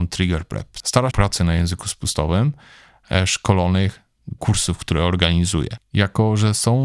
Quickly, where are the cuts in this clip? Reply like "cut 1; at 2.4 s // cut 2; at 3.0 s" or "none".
cut 1; at 1.1 s // cut 2; at 4.4 s